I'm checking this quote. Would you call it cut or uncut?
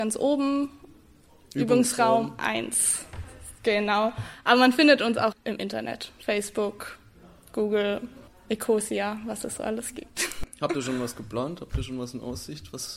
cut